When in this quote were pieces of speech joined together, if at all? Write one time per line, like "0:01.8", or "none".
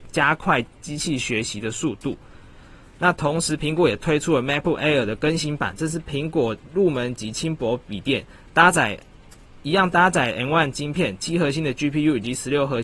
none